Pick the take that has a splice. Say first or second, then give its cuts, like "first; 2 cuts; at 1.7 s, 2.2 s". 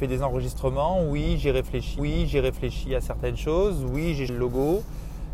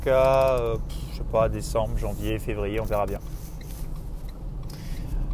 first; 2 cuts; at 2.0 s, 4.3 s